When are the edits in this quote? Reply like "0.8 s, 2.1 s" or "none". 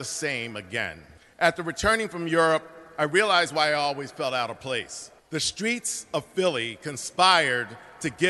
1.2 s, 5.2 s